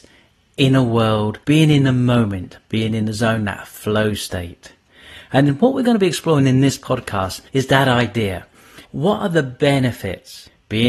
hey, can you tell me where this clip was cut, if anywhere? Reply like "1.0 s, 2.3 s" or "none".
1.4 s, 7.5 s, 8.8 s